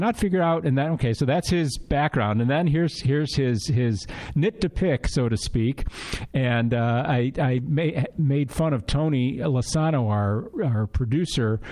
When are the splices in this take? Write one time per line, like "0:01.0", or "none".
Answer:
none